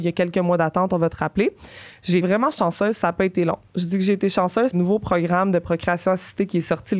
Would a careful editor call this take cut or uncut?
cut